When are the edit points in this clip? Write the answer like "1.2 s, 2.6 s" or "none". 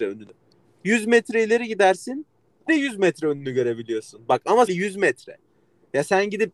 2.7 s, 4.7 s